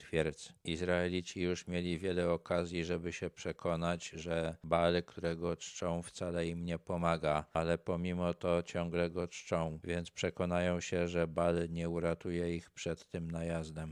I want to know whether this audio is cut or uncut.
uncut